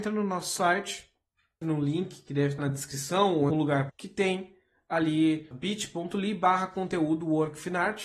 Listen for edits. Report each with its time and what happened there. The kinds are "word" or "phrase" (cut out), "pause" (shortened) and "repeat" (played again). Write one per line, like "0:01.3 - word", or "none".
0:01.6 - word
0:02.6 - word
0:03.5 - word
0:03.9 - word
0:05.5 - word

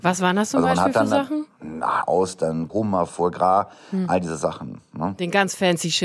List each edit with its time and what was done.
0:02.0 - phrase
0:02.7 - word

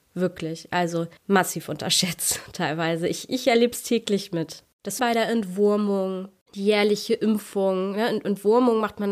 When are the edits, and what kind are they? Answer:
0:01.2 - pause
0:05.0 - phrase

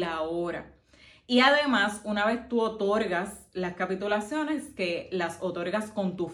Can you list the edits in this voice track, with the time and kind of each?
none

